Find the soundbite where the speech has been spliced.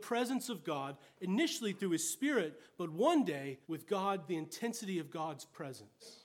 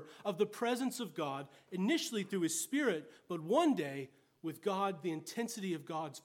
first; 1 cut; at 3.6 s

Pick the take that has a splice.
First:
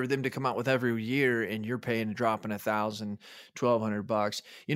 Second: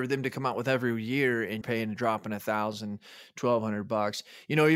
second; 1 cut; at 1.6 s

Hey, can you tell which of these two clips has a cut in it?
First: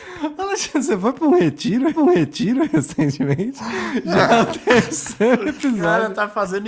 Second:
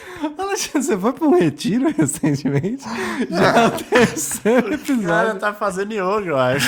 first; 1 cut; at 1.9 s

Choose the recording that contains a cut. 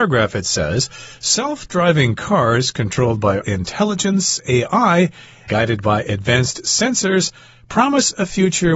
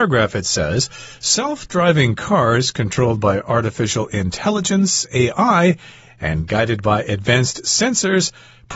first; 2 cuts; at 3.4 s, 5.5 s

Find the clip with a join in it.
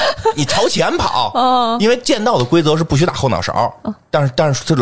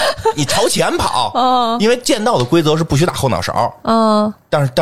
first; 1 cut; at 3.9 s

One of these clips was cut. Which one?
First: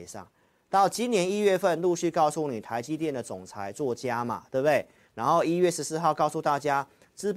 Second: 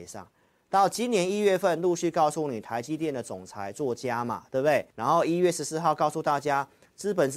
second; 1 cut; at 4.9 s

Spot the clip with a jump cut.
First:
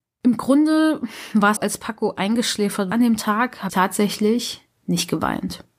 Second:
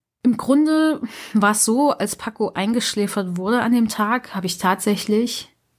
first; 4 cuts; at 1.6 s, 2.9 s, 3.7 s, 4.8 s

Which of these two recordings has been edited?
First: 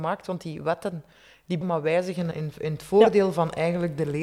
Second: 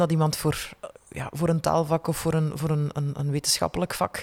first; 2 cuts; at 1.6 s, 2.3 s

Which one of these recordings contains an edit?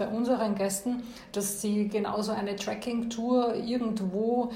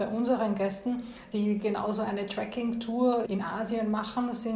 second; 2 cuts; at 1.3 s, 3.3 s

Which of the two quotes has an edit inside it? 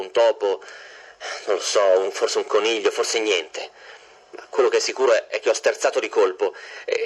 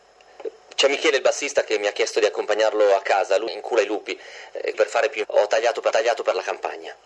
second; 4 cuts; at 3.5 s, 4.7 s, 5.2 s, 5.9 s

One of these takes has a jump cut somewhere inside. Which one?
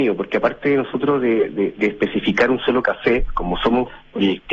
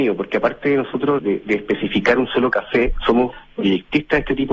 second; 2 cuts; at 1.2 s, 3.0 s

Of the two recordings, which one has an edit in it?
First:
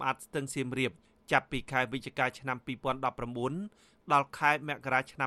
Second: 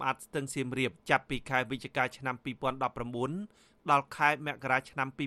second; 1 cut; at 1.0 s

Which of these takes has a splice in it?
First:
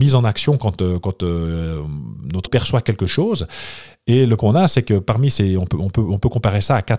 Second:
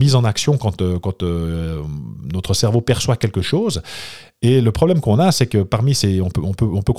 first; 2 cuts; at 2.5 s, 4.4 s

